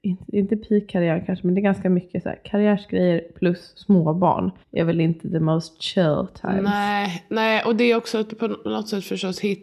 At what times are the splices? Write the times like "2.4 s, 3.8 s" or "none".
4.6 s